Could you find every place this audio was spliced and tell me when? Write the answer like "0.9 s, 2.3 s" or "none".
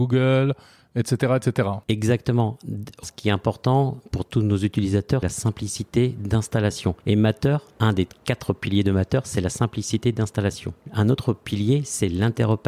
1.8 s, 3.0 s, 5.2 s, 7.0 s, 10.8 s